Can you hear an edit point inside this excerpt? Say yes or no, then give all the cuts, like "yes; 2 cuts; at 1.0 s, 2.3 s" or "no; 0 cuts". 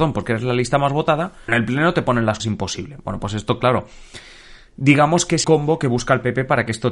yes; 3 cuts; at 1.5 s, 2.4 s, 5.4 s